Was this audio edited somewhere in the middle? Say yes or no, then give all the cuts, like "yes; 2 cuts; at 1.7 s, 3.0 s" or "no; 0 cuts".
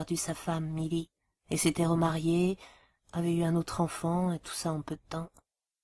no; 0 cuts